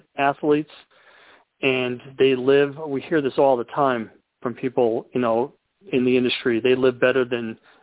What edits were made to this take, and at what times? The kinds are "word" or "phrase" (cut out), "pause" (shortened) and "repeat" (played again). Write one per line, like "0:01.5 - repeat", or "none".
none